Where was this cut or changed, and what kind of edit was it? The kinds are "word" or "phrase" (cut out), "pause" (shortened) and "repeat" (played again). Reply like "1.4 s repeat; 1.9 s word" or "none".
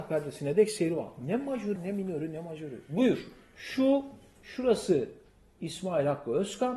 1.8 s word